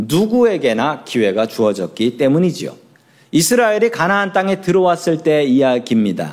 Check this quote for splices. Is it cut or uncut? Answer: cut